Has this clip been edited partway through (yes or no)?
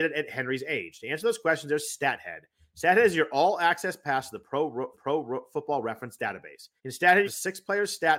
yes